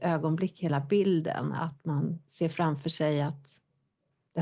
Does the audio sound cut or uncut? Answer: cut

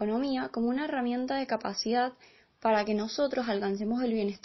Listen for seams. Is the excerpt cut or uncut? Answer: uncut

